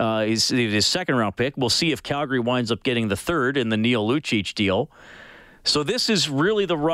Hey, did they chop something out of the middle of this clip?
no; 0 cuts

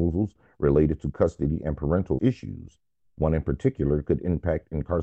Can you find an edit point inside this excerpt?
yes; 1 cut; at 2.2 s

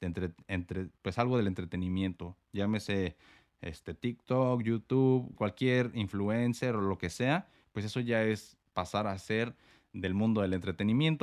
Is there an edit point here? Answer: yes; 1 cut; at 5.4 s

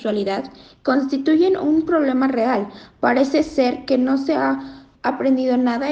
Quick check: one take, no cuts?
no; 1 cut; at 4.9 s

